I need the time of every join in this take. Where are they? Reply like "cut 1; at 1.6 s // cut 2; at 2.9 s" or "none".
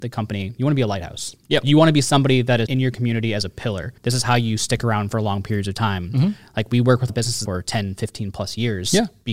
cut 1; at 2.7 s // cut 2; at 4.0 s // cut 3; at 7.1 s // cut 4; at 7.5 s